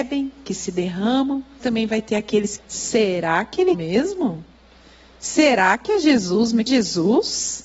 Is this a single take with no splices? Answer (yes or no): no